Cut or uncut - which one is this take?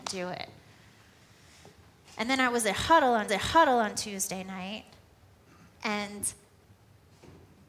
cut